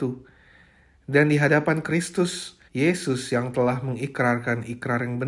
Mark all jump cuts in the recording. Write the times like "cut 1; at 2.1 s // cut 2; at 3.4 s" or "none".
cut 1; at 2.7 s